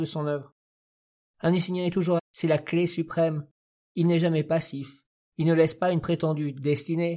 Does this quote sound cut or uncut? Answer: cut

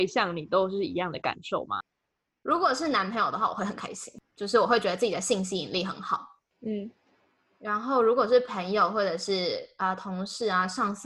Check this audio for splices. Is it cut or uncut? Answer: uncut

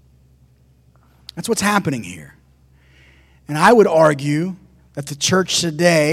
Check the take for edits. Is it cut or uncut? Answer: uncut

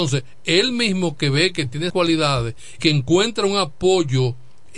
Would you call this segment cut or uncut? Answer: cut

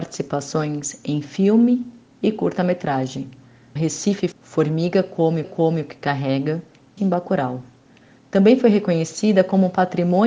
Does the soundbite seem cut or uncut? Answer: cut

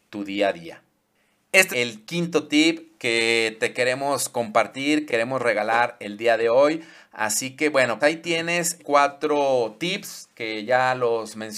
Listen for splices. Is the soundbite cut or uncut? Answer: cut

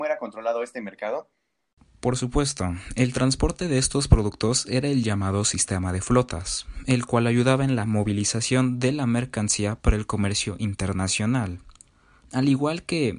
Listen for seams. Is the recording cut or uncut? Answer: uncut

